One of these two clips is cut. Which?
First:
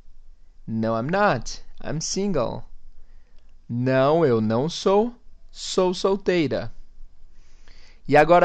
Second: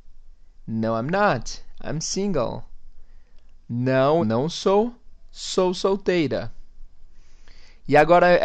second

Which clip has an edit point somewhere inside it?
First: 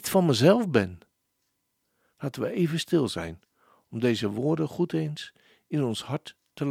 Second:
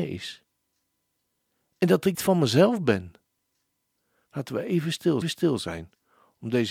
second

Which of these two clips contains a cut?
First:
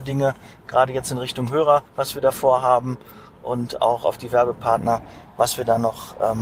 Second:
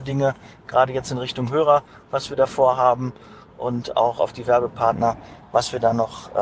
first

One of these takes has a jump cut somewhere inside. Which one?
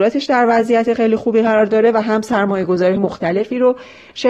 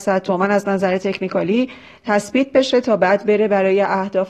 first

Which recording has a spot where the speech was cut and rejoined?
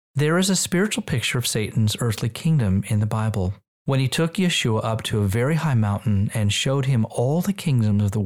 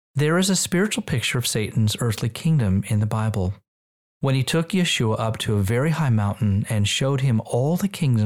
first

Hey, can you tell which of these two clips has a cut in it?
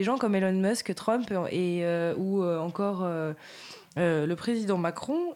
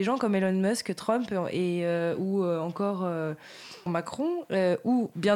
second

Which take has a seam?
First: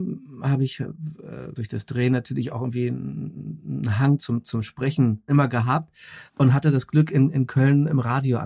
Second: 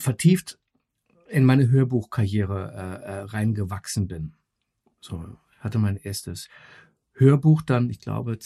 first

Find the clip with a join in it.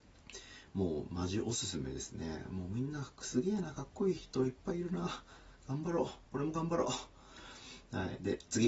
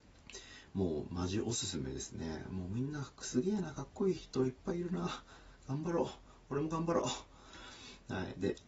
first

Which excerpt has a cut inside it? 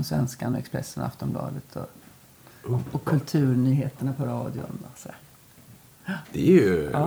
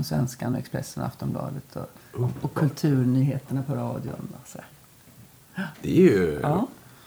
second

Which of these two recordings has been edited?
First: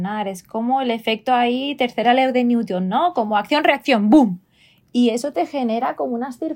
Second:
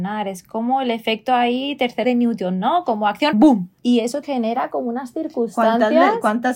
second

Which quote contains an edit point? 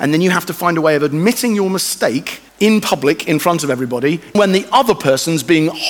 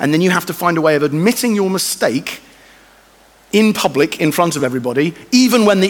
first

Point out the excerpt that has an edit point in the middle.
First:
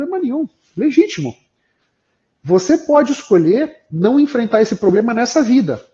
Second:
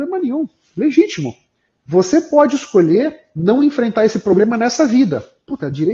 second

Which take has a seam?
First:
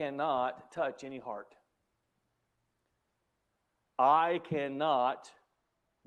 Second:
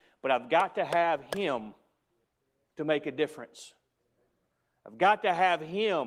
second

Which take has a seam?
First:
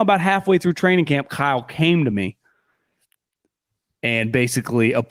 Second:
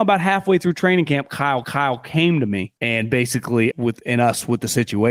second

